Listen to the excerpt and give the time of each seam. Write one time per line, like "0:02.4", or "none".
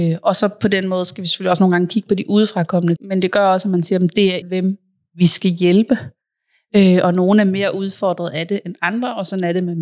0:03.0
0:04.4